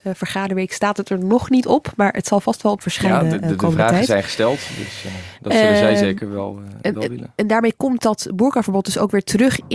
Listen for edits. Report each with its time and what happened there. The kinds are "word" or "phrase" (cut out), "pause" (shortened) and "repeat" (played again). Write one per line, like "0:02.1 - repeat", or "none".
0:02.8 - phrase